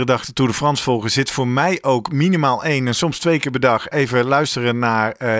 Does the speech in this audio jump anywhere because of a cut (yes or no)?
no